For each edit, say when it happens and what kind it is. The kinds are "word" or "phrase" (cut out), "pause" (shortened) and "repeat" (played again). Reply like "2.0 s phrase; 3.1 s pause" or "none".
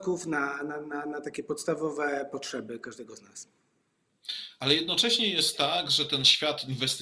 none